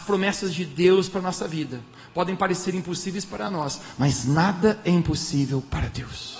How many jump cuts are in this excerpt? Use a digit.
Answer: 0